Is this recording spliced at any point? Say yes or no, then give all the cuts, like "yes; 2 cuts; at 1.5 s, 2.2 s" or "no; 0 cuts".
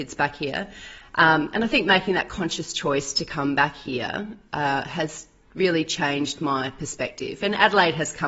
no; 0 cuts